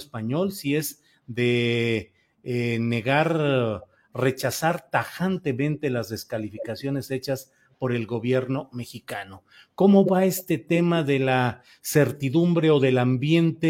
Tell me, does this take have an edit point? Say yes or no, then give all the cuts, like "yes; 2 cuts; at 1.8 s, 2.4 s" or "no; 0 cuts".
no; 0 cuts